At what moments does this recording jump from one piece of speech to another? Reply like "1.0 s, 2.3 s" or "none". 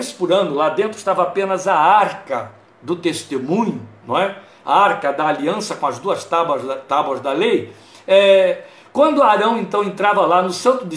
none